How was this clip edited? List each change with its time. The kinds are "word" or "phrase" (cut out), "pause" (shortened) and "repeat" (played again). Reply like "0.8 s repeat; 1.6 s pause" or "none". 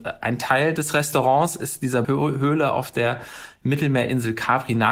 2.0 s word